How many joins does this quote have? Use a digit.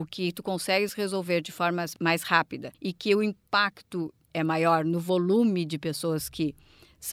1